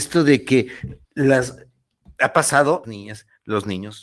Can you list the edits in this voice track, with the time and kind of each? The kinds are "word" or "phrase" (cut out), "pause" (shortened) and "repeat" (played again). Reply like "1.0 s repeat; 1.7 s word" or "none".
1.0 s pause; 2.8 s phrase